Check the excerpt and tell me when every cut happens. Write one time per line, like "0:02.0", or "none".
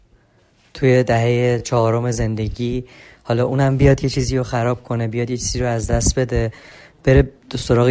none